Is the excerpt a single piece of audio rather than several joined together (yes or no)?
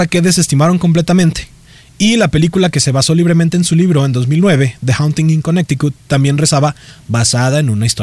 yes